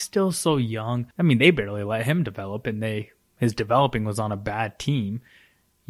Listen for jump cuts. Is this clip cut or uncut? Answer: cut